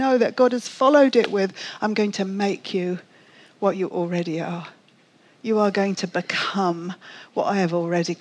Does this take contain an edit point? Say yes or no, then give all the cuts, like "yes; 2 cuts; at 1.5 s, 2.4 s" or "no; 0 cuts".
no; 0 cuts